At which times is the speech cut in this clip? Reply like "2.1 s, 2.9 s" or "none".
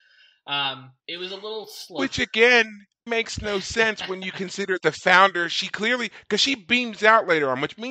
1.0 s, 3.1 s, 4.8 s

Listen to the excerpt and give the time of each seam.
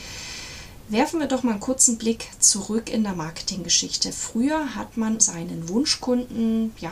5.2 s

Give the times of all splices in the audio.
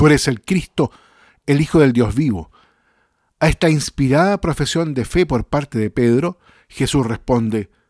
none

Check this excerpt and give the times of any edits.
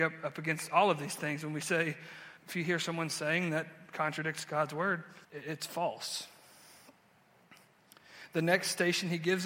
2.4 s, 5.2 s

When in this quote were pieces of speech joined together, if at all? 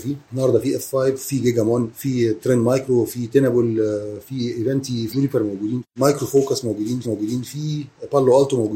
5.1 s, 7.0 s

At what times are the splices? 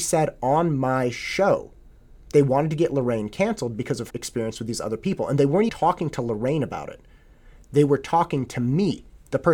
4.1 s, 5.7 s

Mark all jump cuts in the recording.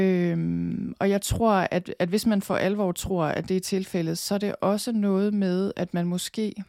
none

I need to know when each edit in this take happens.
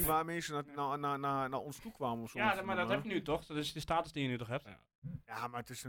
none

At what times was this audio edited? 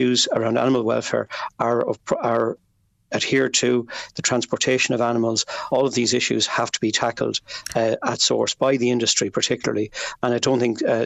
none

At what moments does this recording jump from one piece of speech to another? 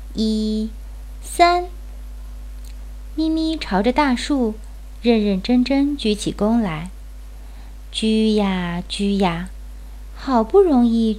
1.2 s

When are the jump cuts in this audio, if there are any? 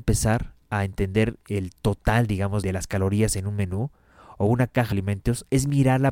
2.6 s, 4.9 s

